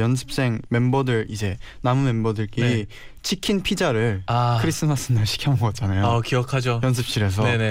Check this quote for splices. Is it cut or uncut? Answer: uncut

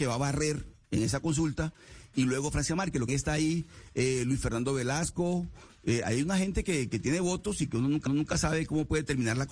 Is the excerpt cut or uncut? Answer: cut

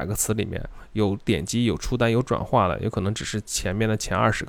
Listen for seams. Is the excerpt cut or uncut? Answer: uncut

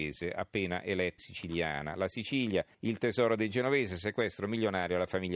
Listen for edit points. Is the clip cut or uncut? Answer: cut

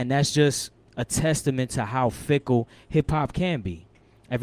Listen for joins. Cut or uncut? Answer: uncut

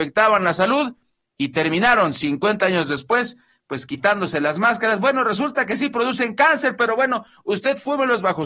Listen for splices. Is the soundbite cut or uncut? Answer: uncut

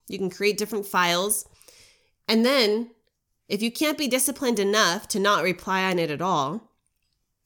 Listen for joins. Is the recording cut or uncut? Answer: uncut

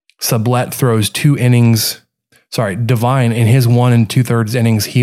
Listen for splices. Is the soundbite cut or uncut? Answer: uncut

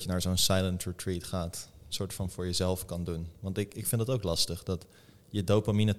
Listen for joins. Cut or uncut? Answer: uncut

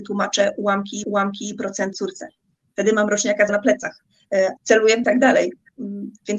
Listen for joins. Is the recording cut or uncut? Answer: cut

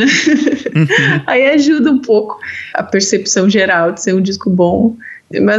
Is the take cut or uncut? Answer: uncut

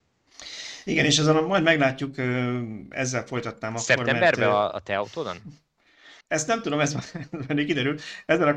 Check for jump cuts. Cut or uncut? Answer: cut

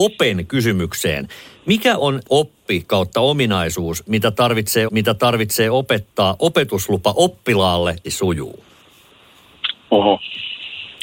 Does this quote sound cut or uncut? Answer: cut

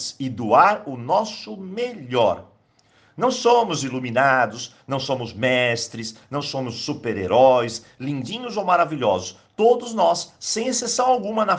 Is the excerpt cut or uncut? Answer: uncut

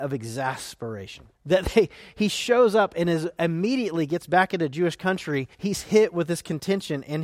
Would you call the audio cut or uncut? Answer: cut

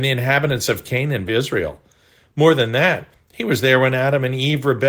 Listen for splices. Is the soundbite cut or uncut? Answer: cut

